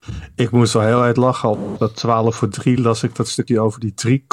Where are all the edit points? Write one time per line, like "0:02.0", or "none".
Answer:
none